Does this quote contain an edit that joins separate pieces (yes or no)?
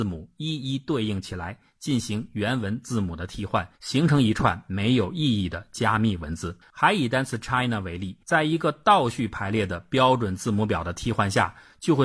yes